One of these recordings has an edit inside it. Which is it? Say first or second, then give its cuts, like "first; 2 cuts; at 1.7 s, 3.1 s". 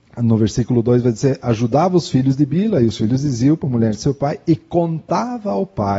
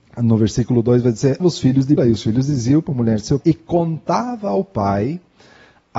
second; 3 cuts; at 1.4 s, 2.0 s, 3.4 s